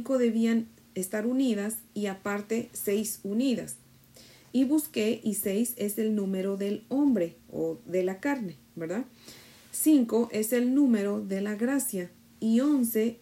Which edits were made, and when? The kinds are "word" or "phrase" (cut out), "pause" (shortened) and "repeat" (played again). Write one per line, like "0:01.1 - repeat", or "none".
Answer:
none